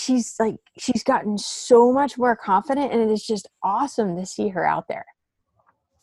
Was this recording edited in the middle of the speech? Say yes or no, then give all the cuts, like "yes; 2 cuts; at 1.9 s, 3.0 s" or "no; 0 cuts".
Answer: no; 0 cuts